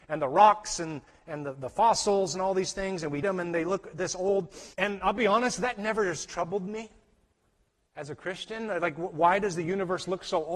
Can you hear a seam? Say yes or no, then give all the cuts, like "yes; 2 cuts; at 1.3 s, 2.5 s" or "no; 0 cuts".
yes; 2 cuts; at 3.2 s, 4.7 s